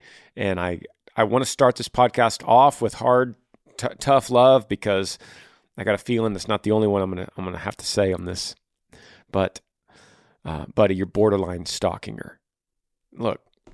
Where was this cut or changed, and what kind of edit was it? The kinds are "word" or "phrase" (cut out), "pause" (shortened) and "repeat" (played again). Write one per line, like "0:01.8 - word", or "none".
none